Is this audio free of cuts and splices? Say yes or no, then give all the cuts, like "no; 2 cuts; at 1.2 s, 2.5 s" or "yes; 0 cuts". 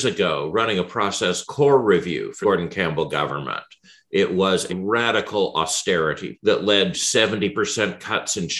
no; 5 cuts; at 1.5 s, 2.4 s, 4.7 s, 6.3 s, 6.9 s